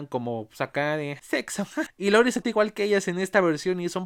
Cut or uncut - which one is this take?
cut